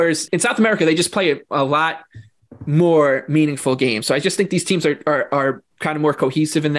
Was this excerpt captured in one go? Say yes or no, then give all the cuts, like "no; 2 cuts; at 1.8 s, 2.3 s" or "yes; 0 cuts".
yes; 0 cuts